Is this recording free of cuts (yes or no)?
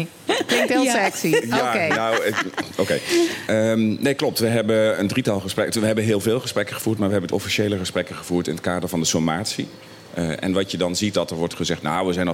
no